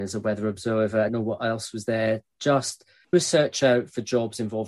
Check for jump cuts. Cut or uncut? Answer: cut